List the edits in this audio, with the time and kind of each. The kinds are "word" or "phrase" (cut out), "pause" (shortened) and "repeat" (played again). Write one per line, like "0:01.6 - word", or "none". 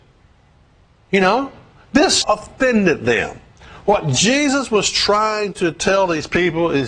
0:02.2 - word

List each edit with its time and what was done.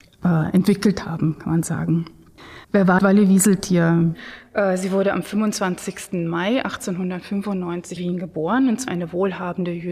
0:02.6 - pause
0:03.0 - word
0:08.0 - word
0:08.9 - word

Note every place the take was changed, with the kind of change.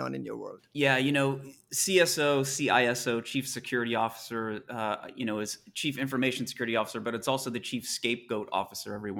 none

